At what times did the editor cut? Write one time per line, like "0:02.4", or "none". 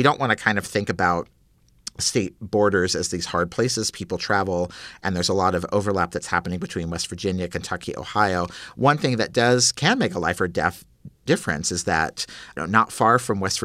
0:12.6